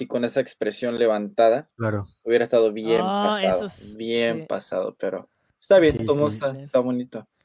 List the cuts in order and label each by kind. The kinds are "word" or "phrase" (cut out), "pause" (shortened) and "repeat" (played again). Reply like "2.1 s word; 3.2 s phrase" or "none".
none